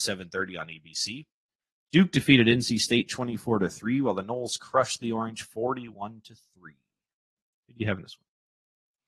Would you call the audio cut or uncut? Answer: uncut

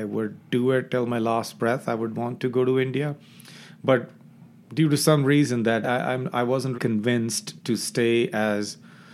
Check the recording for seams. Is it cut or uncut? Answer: cut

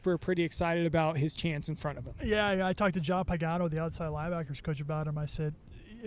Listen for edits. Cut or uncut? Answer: uncut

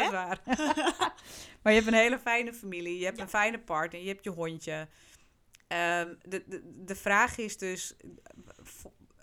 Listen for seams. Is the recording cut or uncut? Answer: uncut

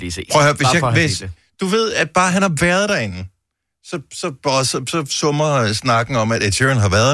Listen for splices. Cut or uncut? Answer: uncut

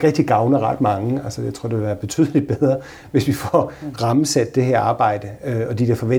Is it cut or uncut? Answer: uncut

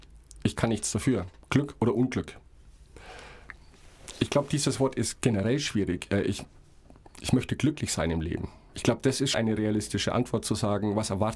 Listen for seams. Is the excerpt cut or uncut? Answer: cut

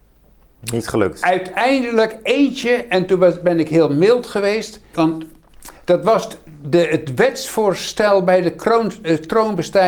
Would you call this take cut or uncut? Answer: cut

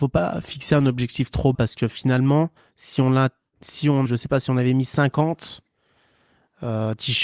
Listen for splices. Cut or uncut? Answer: cut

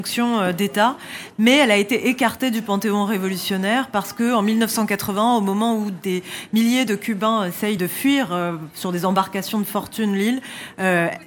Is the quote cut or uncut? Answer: uncut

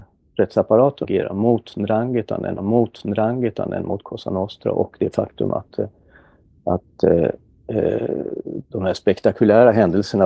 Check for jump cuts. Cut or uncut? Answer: cut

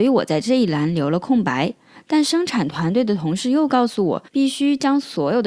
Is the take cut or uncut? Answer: cut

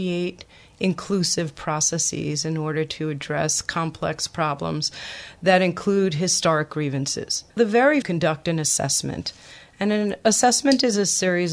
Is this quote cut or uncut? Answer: cut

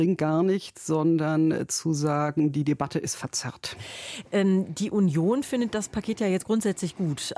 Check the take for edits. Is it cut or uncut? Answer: uncut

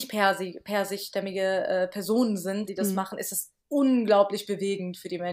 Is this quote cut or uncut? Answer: cut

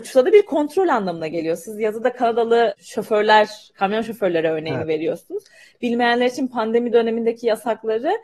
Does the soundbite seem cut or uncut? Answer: uncut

